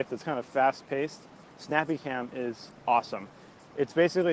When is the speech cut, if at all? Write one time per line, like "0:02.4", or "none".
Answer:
none